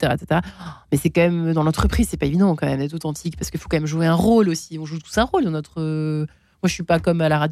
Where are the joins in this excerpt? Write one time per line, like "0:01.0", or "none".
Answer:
none